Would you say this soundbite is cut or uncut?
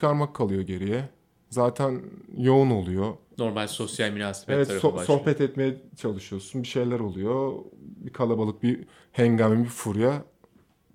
cut